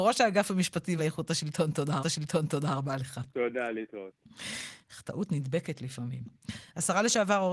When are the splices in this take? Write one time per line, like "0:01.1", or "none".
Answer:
0:01.0
0:02.0
0:03.3